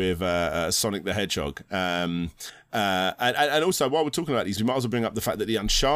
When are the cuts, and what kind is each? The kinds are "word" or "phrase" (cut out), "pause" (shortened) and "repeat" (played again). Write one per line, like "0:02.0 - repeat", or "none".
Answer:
0:04.6 - phrase